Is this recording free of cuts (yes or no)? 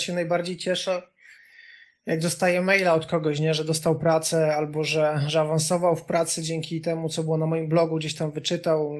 yes